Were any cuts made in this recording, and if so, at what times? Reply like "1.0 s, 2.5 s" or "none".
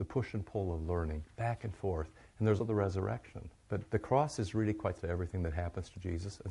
2.6 s, 3.6 s, 5.0 s